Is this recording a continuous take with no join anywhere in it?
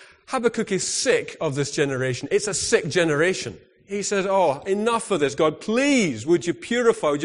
yes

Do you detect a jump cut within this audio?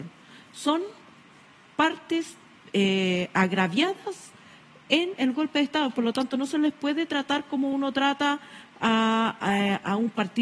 no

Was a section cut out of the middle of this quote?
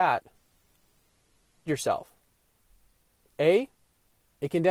yes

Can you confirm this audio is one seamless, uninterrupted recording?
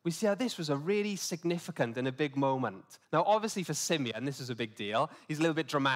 no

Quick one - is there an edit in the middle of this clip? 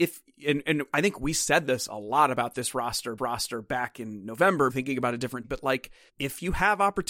yes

